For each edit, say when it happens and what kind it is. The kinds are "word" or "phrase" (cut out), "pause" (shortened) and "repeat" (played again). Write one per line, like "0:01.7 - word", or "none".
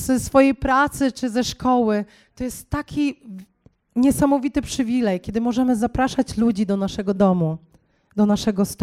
none